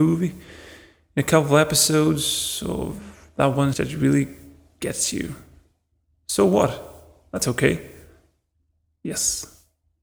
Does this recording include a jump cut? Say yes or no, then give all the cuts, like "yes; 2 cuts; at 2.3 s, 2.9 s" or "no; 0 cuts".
yes; 1 cut; at 3.7 s